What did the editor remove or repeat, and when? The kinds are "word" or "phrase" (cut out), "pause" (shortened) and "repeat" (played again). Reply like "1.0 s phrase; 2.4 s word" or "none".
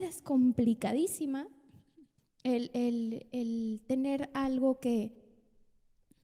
none